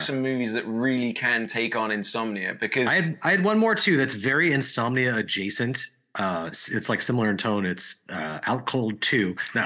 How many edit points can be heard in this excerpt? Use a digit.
0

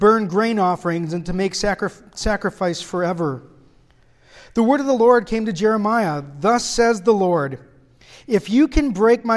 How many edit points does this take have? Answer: 0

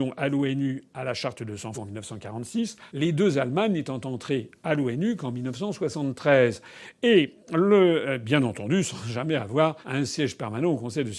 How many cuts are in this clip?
3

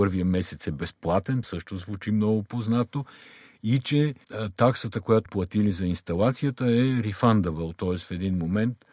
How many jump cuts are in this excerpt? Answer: 3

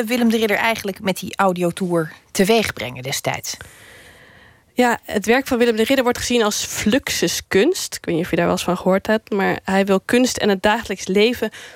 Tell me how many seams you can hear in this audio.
0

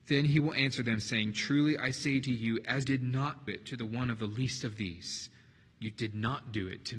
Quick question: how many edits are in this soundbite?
2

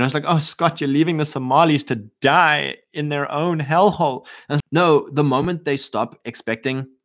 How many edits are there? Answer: 1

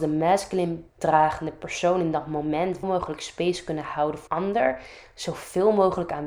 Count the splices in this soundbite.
3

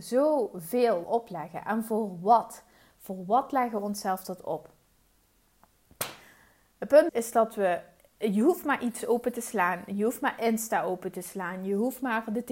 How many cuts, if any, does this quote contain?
3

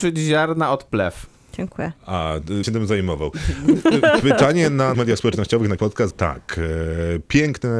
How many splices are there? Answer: 4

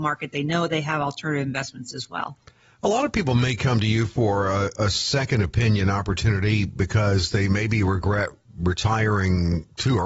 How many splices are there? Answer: 0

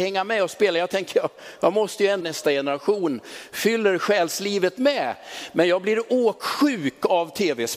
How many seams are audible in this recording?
1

